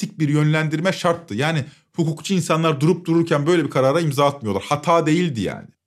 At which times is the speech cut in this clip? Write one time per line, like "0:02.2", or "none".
none